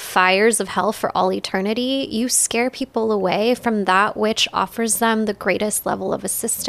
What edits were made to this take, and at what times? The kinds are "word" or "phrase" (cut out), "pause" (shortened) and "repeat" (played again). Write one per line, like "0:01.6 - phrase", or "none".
none